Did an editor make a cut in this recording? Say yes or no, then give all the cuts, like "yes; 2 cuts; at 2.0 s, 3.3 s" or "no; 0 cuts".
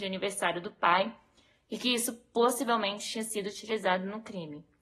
no; 0 cuts